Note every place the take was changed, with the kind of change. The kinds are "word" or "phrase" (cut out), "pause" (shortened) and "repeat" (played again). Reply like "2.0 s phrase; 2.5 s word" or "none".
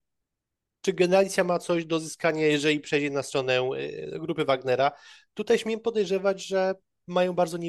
none